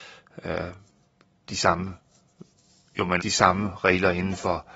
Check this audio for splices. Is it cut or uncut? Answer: cut